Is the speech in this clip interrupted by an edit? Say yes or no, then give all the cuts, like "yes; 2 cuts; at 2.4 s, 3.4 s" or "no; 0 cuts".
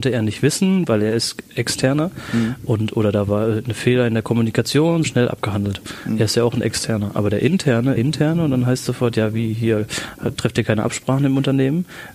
yes; 2 cuts; at 5.0 s, 8.0 s